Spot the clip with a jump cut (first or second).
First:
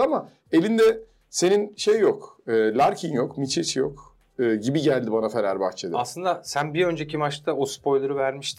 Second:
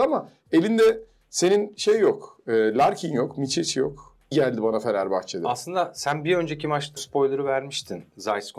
second